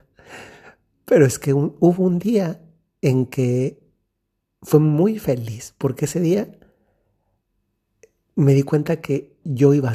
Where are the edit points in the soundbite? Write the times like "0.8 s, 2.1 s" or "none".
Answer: none